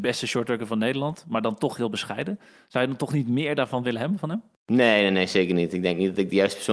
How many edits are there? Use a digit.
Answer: 0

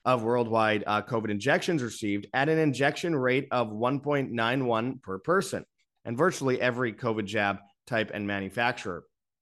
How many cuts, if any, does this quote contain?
0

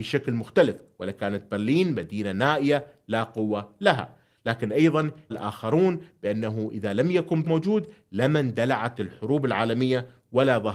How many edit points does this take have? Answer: 2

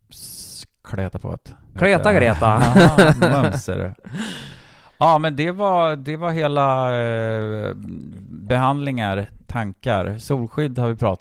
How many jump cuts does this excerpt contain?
0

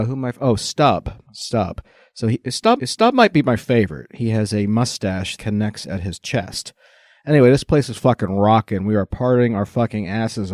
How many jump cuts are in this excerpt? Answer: 3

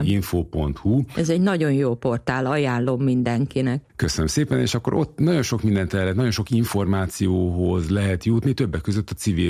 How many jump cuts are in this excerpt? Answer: 1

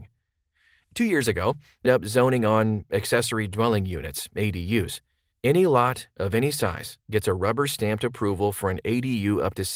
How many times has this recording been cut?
3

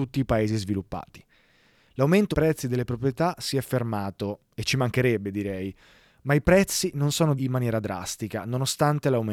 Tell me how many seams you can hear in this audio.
3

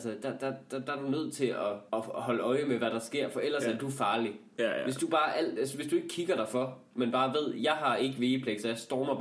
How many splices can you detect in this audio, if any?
1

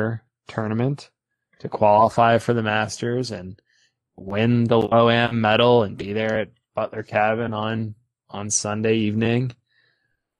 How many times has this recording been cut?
0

